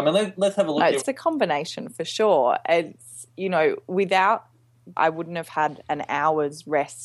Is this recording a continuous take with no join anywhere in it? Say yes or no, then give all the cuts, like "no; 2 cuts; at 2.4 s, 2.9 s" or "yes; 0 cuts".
no; 2 cuts; at 1.0 s, 5.0 s